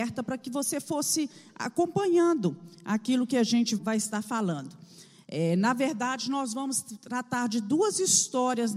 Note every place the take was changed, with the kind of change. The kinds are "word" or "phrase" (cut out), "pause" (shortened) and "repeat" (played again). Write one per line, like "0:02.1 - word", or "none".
0:03.8 - word